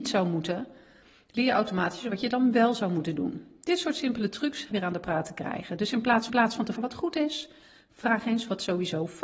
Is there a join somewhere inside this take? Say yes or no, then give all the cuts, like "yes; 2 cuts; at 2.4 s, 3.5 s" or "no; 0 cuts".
yes; 3 cuts; at 4.7 s, 6.3 s, 6.8 s